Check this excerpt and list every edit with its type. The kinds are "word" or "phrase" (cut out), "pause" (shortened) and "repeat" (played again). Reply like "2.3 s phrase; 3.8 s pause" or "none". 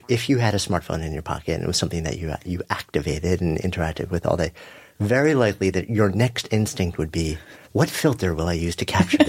7.6 s pause